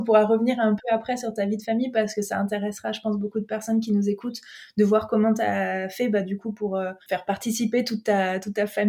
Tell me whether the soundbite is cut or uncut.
cut